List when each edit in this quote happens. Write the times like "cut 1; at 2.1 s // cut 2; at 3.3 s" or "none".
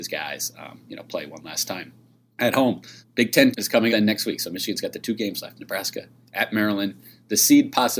cut 1; at 3.5 s // cut 2; at 3.9 s

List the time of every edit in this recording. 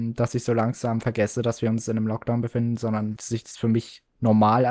cut 1; at 3.2 s

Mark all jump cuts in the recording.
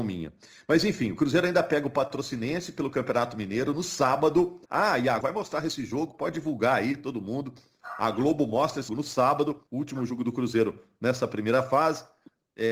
cut 1; at 4.7 s // cut 2; at 5.2 s // cut 3; at 8.9 s // cut 4; at 9.7 s

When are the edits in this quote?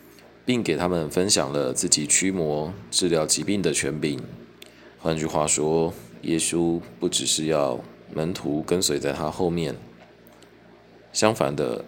cut 1; at 4.9 s

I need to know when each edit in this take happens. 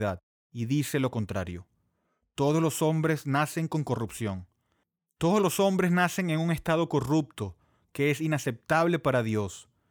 none

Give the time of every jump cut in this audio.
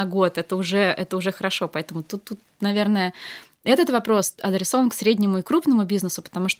none

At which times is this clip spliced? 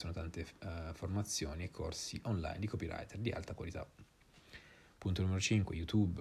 none

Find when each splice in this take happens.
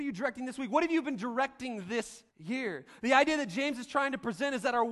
cut 1; at 2.3 s

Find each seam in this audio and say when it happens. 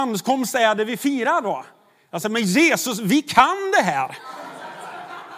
none

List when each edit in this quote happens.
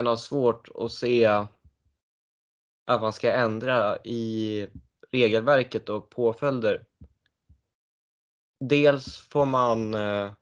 none

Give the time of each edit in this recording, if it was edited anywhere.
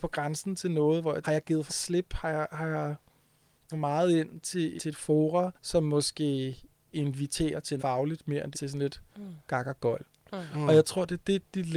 cut 1; at 1.2 s // cut 2; at 1.7 s // cut 3; at 3.7 s // cut 4; at 4.8 s // cut 5; at 5.5 s // cut 6; at 6.9 s // cut 7; at 7.8 s // cut 8; at 8.5 s // cut 9; at 9.1 s

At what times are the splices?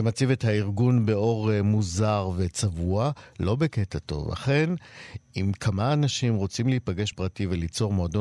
cut 1; at 7.1 s

